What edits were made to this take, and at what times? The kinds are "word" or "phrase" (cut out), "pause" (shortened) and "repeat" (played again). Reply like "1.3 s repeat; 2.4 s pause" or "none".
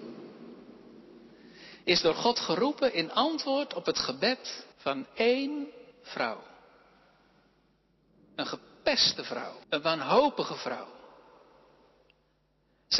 4.7 s pause; 5.9 s pause; 9.6 s pause